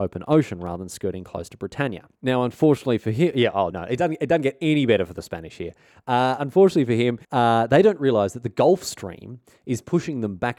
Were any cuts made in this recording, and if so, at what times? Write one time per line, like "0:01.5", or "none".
0:02.2
0:03.7
0:06.4
0:07.2